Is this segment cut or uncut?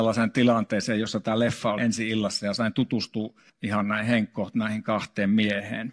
cut